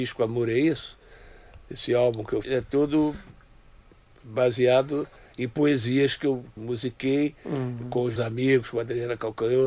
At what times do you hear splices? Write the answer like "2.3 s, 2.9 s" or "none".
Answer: 2.4 s, 6.6 s, 8.2 s